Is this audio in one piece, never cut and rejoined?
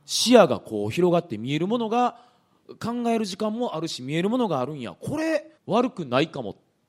no; 1 cut; at 5.6 s

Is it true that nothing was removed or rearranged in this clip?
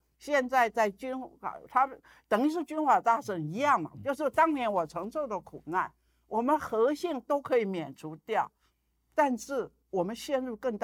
yes; 0 cuts

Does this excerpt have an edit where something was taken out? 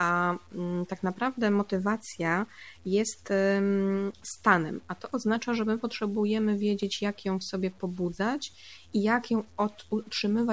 no; 0 cuts

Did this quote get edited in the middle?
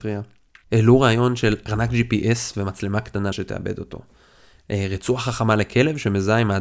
yes; 1 cut; at 3.3 s

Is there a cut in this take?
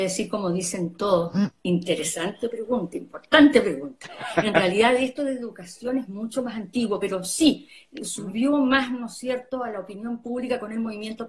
no; 0 cuts

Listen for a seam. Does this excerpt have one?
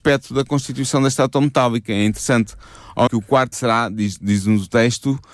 yes; 2 cuts; at 3.1 s, 3.5 s

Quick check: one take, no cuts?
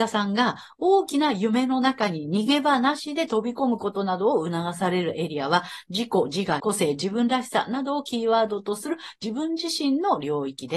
no; 1 cut; at 6.6 s

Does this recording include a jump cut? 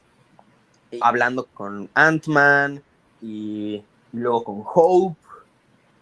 yes; 3 cuts; at 1.0 s, 1.5 s, 3.9 s

